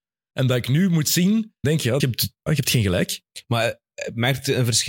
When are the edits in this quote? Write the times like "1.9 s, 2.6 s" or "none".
1.6 s, 2.0 s, 2.5 s